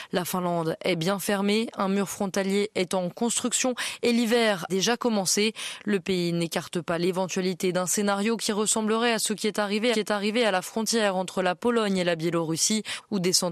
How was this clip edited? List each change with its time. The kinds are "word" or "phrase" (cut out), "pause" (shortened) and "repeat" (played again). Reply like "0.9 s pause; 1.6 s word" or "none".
4.7 s word; 9.9 s repeat